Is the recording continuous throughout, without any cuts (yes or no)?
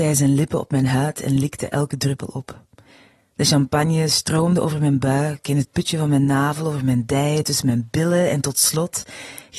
yes